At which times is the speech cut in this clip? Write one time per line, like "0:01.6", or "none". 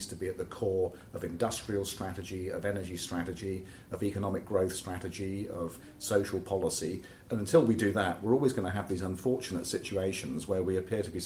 none